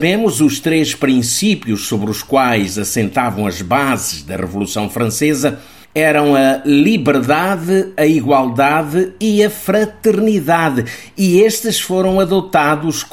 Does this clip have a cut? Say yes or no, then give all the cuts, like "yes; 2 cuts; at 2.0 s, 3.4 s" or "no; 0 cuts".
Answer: no; 0 cuts